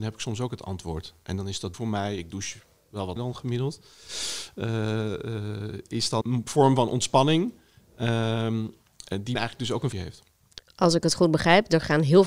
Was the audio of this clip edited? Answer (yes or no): yes